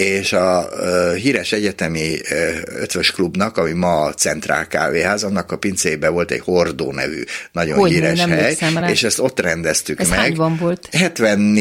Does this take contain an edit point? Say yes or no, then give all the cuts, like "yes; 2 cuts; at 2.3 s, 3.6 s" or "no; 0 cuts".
no; 0 cuts